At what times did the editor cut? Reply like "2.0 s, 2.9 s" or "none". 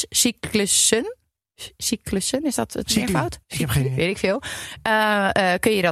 3.4 s